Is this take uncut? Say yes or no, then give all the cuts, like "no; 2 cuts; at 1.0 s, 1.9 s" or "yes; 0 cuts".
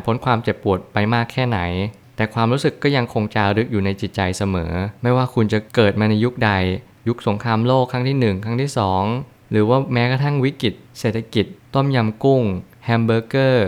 no; 2 cuts; at 5.0 s, 5.7 s